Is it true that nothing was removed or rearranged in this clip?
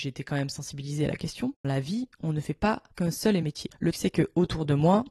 no; 4 cuts; at 1.6 s, 2.9 s, 3.4 s, 3.9 s

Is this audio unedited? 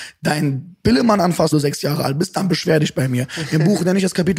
no; 1 cut; at 1.5 s

